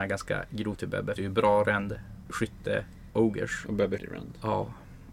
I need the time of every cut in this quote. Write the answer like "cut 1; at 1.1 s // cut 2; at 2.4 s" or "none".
cut 1; at 1.2 s // cut 2; at 4.0 s